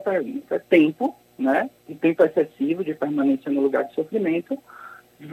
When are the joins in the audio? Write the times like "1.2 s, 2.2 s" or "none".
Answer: 1.8 s